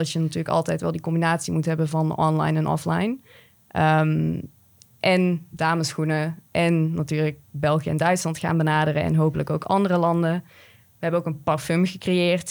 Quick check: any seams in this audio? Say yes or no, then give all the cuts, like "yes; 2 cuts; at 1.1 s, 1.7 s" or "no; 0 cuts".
no; 0 cuts